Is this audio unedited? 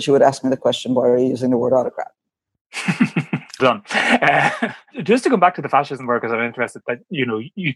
no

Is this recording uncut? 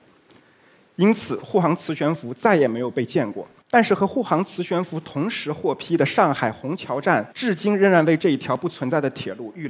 no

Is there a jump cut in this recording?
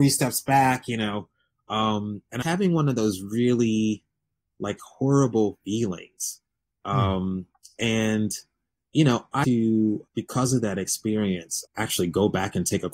yes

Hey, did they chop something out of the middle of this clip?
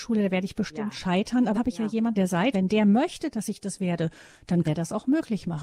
yes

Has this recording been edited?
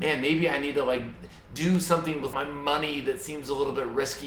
yes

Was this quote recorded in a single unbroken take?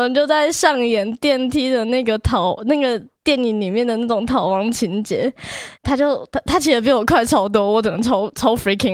no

